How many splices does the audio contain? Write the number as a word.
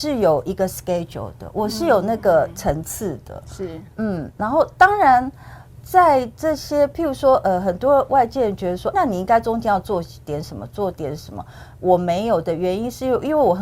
one